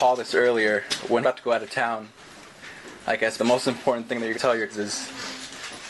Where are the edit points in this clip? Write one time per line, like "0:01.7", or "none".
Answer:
0:01.2
0:03.4
0:04.3
0:04.7